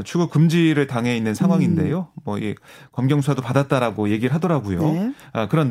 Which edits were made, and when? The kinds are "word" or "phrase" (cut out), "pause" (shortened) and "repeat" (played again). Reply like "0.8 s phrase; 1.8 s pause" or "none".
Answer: none